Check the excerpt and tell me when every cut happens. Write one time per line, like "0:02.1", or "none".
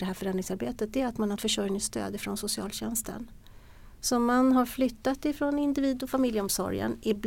0:01.4